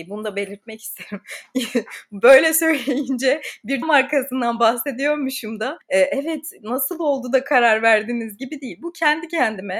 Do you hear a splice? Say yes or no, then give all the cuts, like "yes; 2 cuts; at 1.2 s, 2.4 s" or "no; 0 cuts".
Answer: yes; 1 cut; at 3.8 s